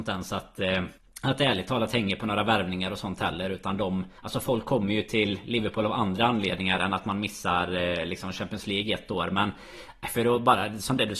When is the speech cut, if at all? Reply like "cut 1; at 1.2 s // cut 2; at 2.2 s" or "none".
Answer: cut 1; at 1.0 s // cut 2; at 4.2 s